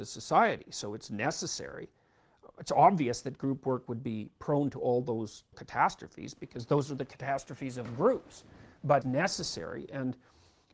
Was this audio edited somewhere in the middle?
yes; 2 cuts; at 5.5 s, 9.0 s

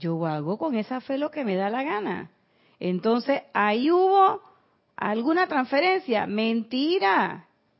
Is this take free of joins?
yes; 0 cuts

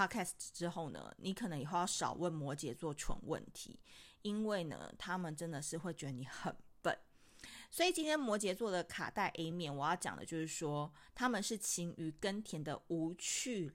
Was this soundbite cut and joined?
no; 0 cuts

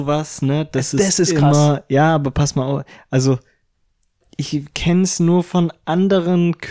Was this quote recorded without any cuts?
yes; 0 cuts

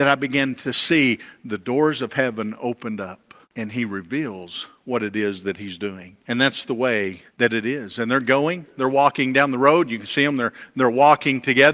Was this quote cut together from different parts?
yes; 3 cuts; at 3.4 s, 6.2 s, 7.3 s

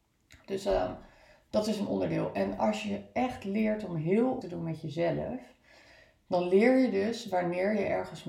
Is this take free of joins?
no; 1 cut; at 4.4 s

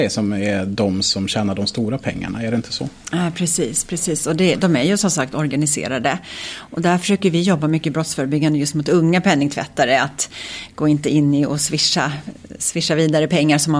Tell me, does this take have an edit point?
no; 0 cuts

